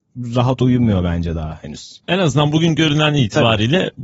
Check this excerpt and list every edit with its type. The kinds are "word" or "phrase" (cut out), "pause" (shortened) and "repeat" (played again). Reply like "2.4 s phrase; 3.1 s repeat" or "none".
2.0 s pause